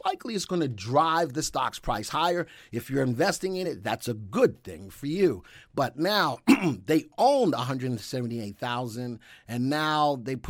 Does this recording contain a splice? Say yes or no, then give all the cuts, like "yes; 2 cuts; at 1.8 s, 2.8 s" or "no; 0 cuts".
no; 0 cuts